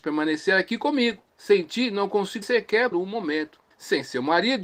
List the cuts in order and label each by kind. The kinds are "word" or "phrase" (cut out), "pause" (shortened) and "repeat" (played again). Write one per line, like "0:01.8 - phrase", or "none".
0:01.3 - pause
0:02.4 - word
0:02.9 - word
0:03.7 - pause